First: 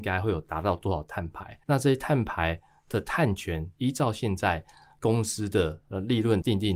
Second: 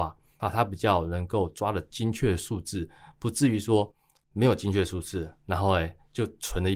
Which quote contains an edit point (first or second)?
first